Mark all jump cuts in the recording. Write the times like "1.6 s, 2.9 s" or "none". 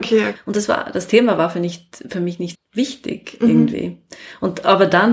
2.5 s